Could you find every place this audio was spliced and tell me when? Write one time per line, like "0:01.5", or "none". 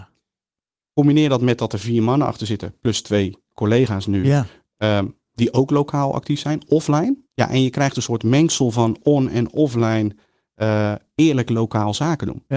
0:07.2